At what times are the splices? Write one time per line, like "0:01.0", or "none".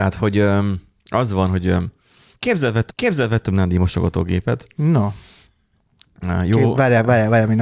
0:02.9

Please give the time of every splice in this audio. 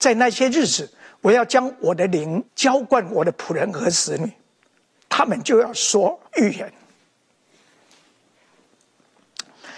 0:02.5
0:06.3

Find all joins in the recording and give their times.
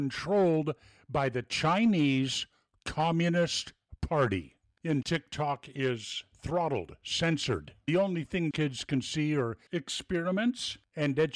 0:05.0
0:08.5
0:09.7

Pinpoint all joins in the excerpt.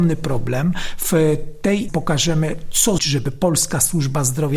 0:01.9
0:03.0

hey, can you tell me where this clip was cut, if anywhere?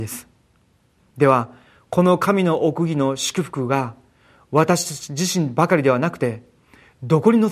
none

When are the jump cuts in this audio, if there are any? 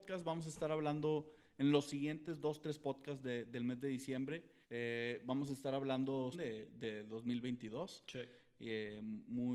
0:04.6
0:06.3

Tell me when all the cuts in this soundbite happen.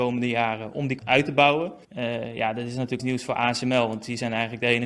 0:01.0
0:01.8
0:03.0

